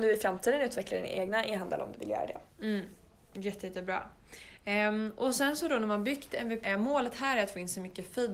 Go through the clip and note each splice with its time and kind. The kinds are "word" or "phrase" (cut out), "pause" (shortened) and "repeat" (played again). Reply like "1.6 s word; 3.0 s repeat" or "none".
1.9 s word; 6.6 s word